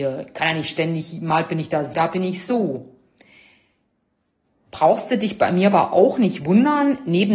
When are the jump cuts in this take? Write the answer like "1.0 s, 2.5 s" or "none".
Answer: 1.9 s